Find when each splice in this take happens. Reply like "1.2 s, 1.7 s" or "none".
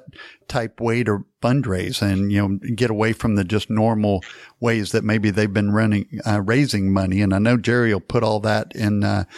none